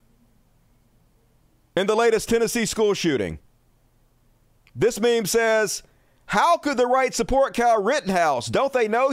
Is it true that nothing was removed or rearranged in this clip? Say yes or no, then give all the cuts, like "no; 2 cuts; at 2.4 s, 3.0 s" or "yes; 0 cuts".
yes; 0 cuts